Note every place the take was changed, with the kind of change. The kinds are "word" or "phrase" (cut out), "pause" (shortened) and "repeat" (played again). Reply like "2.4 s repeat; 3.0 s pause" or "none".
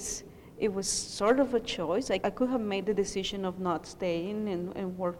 2.2 s word